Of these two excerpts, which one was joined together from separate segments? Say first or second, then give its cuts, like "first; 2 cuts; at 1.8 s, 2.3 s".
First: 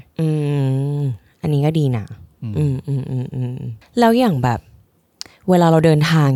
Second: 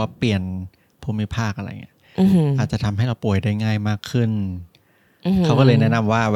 first; 1 cut; at 3.8 s